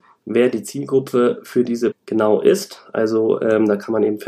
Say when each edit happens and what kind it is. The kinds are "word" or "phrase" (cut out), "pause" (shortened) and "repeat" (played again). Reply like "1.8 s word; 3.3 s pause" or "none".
1.9 s word

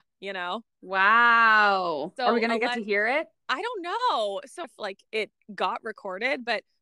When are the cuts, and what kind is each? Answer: 3.3 s pause; 4.6 s phrase; 5.1 s pause

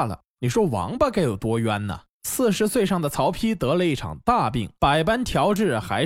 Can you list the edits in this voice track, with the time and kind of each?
2.1 s pause; 4.7 s pause

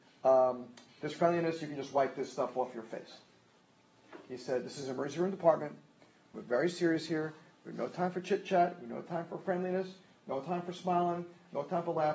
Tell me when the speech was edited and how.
none

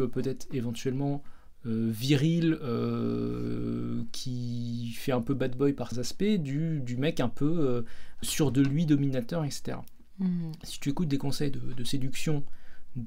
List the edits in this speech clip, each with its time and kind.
5.9 s word; 8.2 s word

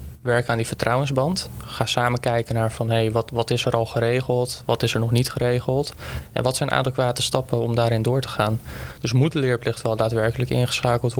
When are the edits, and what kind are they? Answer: none

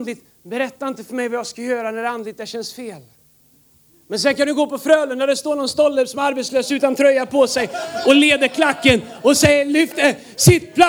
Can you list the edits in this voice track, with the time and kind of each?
none

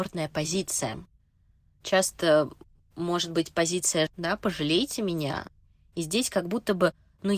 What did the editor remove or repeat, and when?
4.1 s word

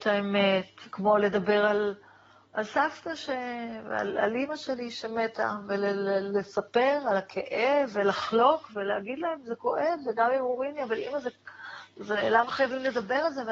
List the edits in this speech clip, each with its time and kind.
none

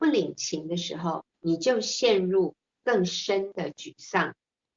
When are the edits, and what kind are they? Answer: 1.3 s pause

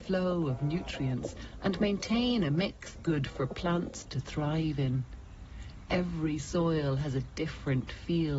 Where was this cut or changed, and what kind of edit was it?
3.0 s word

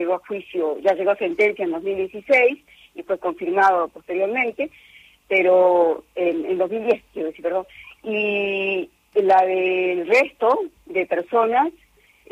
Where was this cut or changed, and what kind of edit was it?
none

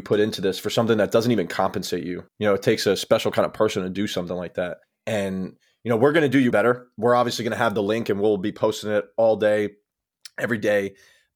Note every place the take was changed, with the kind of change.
2.3 s pause; 4.8 s pause; 6.5 s word

